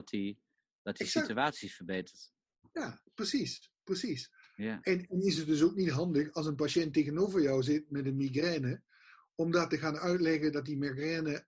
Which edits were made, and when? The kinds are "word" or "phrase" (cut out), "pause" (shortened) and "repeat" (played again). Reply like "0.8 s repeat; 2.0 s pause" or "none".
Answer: none